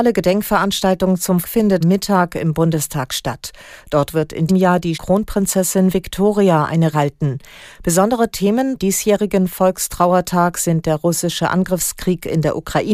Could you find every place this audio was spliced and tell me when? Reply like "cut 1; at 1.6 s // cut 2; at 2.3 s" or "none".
cut 1; at 1.4 s // cut 2; at 1.8 s // cut 3; at 4.5 s // cut 4; at 4.9 s // cut 5; at 6.9 s // cut 6; at 8.8 s